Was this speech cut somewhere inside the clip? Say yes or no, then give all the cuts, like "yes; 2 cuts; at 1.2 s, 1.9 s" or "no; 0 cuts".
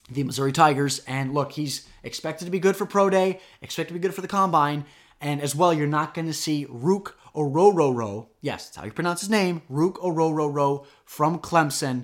no; 0 cuts